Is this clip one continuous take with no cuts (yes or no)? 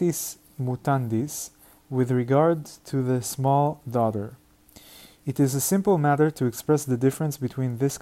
yes